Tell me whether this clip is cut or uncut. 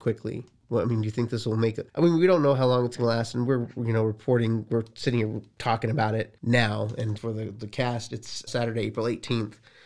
cut